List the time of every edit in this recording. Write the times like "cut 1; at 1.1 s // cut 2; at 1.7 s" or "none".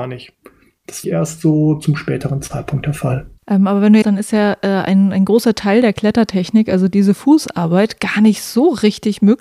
cut 1; at 1.0 s // cut 2; at 3.4 s // cut 3; at 4.0 s

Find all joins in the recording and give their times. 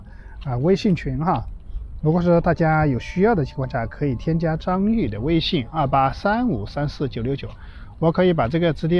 cut 1; at 2.0 s

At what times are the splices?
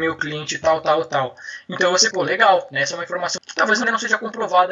cut 1; at 2.1 s // cut 2; at 3.4 s // cut 3; at 3.8 s

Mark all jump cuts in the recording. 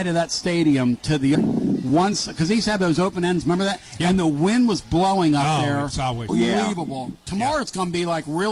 cut 1; at 1.3 s // cut 2; at 3.4 s // cut 3; at 6.3 s

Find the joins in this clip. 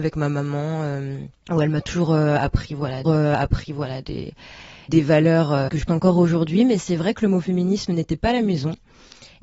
cut 1; at 3.0 s // cut 2; at 5.9 s

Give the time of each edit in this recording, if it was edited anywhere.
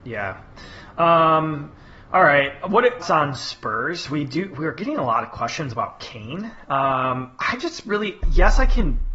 cut 1; at 3.0 s

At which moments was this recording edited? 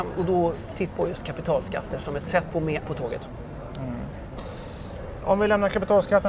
cut 1; at 0.9 s // cut 2; at 2.5 s // cut 3; at 2.8 s

